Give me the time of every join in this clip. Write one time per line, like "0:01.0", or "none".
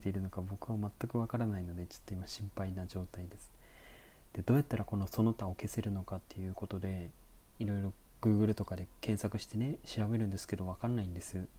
none